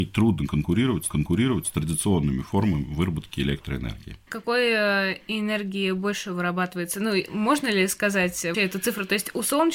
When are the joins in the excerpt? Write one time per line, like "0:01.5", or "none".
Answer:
0:01.1
0:08.5